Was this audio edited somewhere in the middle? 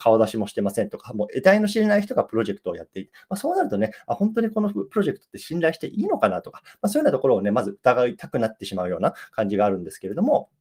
no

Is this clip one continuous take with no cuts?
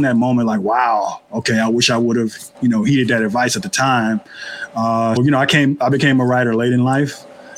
no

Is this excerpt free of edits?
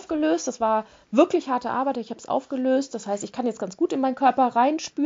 yes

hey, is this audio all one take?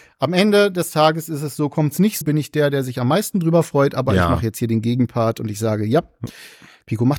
no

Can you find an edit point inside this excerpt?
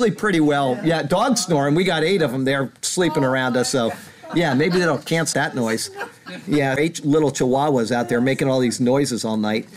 yes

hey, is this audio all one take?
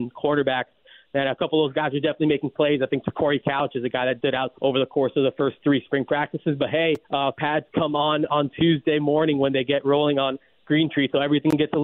no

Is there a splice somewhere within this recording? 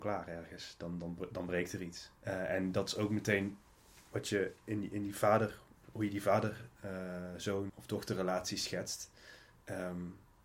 yes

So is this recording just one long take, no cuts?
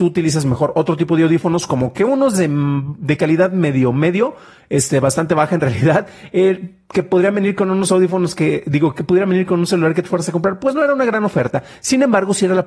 yes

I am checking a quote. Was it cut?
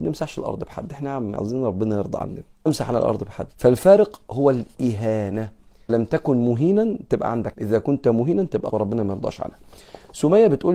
yes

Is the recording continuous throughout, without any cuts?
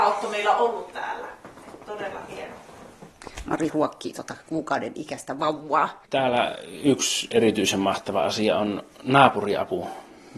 no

